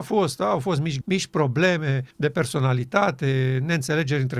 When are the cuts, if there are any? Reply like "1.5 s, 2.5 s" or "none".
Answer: 1.0 s, 2.1 s